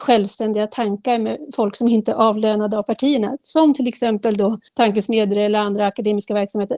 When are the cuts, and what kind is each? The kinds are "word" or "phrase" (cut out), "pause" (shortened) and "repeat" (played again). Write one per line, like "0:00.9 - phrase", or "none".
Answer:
0:04.7 - pause